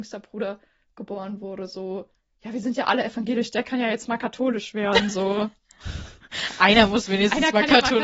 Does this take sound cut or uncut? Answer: uncut